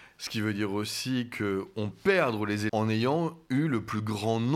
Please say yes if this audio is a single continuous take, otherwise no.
no